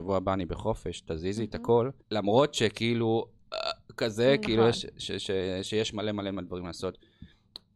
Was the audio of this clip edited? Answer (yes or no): yes